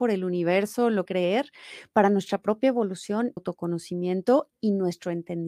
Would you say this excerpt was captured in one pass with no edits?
no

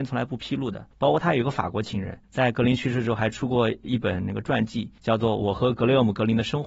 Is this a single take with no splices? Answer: no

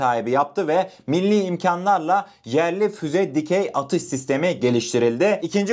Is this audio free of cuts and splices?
yes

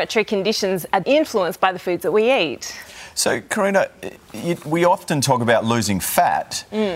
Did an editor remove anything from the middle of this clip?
yes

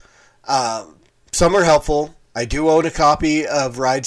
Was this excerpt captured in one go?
yes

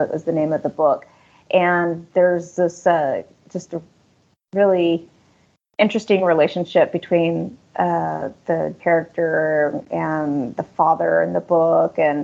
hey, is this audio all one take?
no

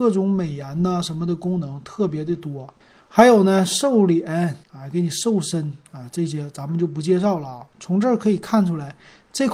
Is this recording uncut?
no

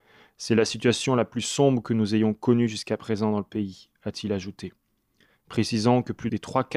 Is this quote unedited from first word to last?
yes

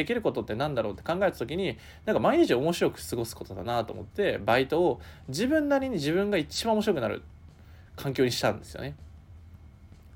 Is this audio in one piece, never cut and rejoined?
yes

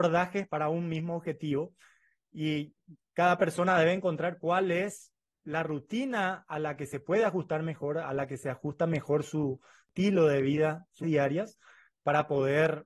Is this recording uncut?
no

